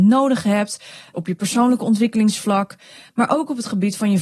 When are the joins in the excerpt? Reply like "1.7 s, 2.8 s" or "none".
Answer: none